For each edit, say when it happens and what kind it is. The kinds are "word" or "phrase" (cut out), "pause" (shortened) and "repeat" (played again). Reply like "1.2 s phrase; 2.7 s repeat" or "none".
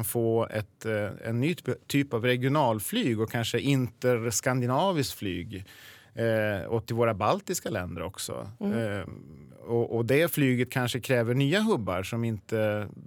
none